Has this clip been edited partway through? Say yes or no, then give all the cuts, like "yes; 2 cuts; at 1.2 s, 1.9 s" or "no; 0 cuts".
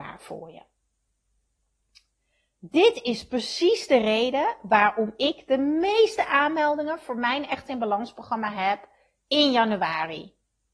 no; 0 cuts